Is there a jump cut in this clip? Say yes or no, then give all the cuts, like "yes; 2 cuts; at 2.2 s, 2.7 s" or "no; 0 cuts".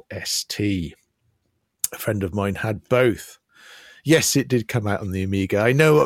no; 0 cuts